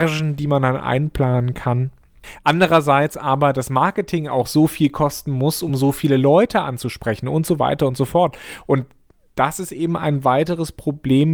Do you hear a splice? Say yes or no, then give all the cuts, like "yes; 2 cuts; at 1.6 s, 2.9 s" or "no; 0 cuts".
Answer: no; 0 cuts